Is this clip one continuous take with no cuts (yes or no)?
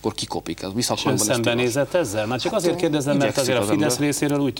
yes